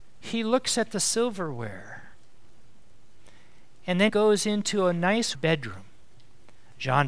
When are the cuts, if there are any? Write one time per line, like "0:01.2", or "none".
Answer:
0:04.1
0:05.3